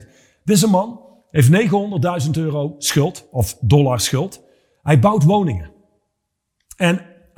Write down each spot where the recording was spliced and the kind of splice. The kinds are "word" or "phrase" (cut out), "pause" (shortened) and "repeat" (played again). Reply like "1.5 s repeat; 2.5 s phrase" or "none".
none

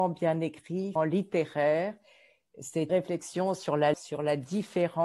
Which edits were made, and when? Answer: 1.0 s word; 2.9 s word; 3.9 s word

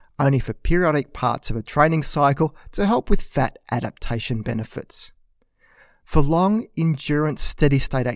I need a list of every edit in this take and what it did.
none

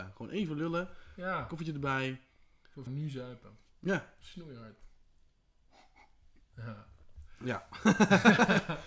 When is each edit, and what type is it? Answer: 2.9 s word

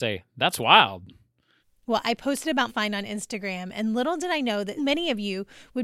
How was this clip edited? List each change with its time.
1.6 s pause; 2.7 s word; 4.8 s word

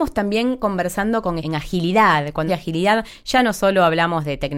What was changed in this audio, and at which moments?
1.4 s phrase; 2.5 s word

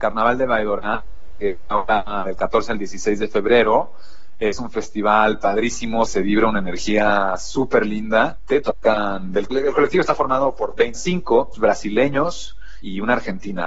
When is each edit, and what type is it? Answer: 6.1 s word; 9.5 s word; 10.9 s phrase; 11.5 s phrase

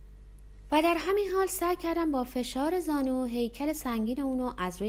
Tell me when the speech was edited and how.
none

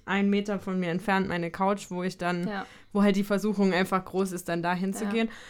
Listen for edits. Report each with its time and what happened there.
none

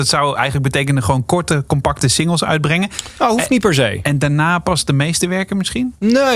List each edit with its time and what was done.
none

